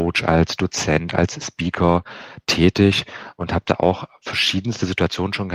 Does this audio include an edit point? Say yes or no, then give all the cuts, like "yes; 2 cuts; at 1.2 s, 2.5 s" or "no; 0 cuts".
no; 0 cuts